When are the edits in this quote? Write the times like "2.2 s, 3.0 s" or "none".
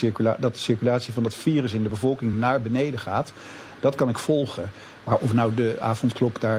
none